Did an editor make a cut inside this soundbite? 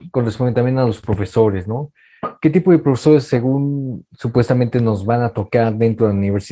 no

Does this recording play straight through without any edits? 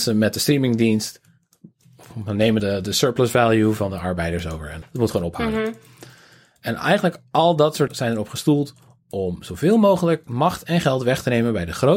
no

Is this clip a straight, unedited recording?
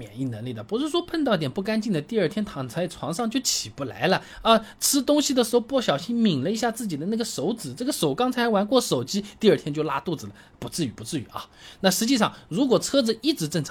yes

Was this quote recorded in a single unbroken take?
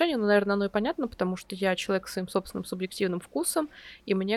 no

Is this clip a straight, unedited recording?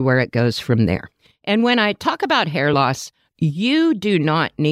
yes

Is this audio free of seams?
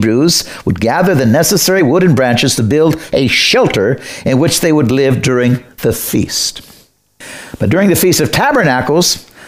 yes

